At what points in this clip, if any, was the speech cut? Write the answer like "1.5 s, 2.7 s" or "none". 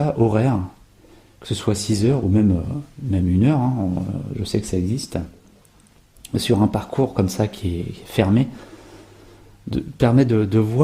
none